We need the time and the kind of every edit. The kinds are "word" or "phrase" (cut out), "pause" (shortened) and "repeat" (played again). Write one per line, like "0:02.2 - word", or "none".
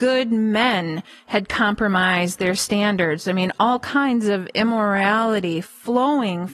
none